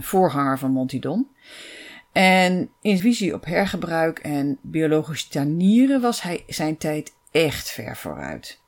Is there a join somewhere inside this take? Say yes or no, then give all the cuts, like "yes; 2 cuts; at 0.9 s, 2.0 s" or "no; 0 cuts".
yes; 1 cut; at 3.0 s